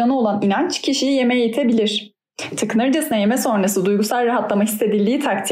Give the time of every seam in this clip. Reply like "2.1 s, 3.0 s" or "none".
none